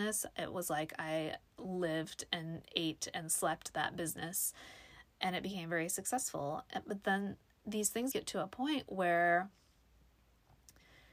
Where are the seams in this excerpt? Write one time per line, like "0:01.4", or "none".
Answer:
0:01.5
0:05.1
0:08.1